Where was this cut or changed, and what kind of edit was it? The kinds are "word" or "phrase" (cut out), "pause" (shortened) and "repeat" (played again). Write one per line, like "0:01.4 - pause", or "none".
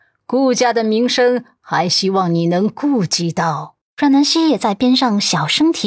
0:03.8 - pause